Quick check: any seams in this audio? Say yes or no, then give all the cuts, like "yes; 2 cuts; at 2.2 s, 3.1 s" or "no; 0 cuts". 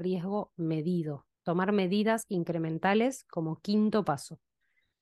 yes; 1 cut; at 1.3 s